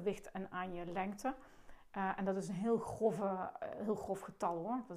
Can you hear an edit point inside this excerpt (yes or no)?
no